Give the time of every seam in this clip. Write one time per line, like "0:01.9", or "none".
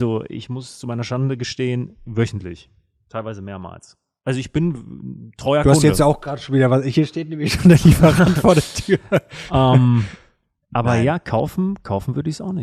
none